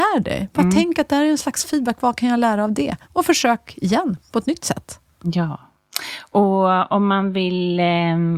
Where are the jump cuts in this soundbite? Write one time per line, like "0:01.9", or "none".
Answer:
0:03.0